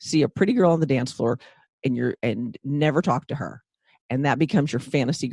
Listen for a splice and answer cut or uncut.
uncut